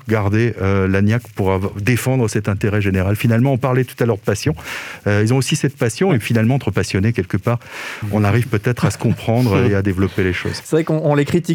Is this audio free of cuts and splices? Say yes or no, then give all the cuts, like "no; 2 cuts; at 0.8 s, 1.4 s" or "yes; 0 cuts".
yes; 0 cuts